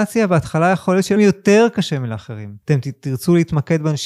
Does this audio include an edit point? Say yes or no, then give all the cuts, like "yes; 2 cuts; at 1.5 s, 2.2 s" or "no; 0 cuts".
yes; 2 cuts; at 1.2 s, 2.6 s